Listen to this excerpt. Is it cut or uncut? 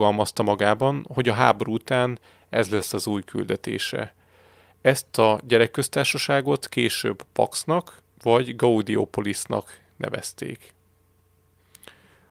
cut